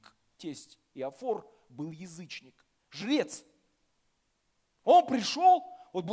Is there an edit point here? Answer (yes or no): no